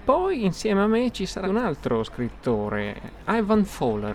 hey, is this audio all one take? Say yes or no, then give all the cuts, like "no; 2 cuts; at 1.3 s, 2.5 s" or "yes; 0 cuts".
no; 1 cut; at 1.4 s